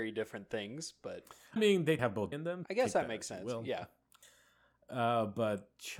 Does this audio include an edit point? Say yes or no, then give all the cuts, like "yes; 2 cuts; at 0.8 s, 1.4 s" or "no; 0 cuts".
yes; 4 cuts; at 1.6 s, 2.0 s, 2.3 s, 2.6 s